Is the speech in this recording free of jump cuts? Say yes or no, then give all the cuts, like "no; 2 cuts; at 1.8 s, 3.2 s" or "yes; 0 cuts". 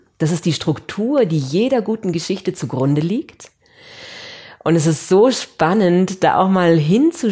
yes; 0 cuts